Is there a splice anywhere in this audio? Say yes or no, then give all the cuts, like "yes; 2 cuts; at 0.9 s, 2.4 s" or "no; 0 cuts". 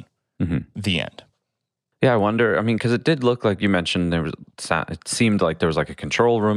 no; 0 cuts